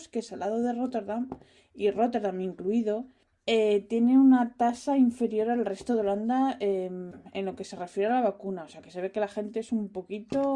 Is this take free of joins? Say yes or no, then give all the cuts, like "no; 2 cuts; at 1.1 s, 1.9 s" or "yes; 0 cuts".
yes; 0 cuts